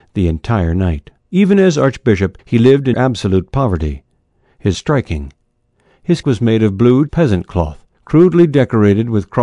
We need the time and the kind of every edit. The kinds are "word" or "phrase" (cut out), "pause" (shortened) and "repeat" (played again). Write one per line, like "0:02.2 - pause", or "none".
0:01.2 - pause
0:02.4 - pause
0:02.9 - word
0:04.7 - phrase
0:06.2 - word
0:07.1 - word
0:07.9 - pause

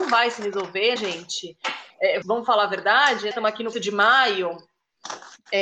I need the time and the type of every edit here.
0:01.0 - word
0:02.2 - word
0:03.3 - word
0:03.7 - word

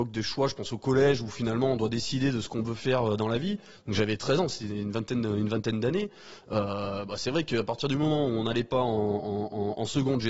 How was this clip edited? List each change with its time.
none

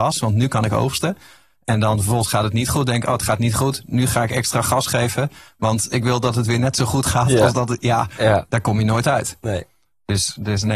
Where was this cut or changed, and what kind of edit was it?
none

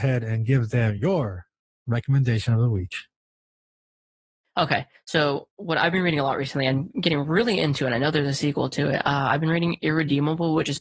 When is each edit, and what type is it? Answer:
none

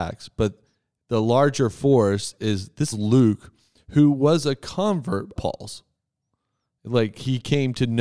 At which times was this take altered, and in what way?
0:02.9 - word
0:05.4 - word

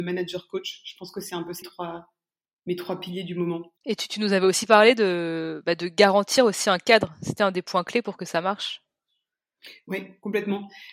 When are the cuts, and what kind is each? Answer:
0:01.6 - word
0:03.8 - pause
0:07.4 - word

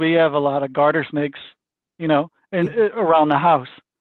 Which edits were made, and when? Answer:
none

